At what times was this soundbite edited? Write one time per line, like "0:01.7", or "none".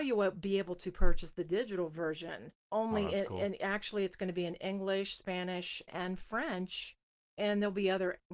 0:02.6
0:05.9